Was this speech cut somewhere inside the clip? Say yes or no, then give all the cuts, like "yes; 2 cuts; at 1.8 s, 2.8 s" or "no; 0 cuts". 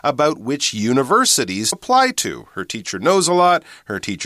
yes; 1 cut; at 1.7 s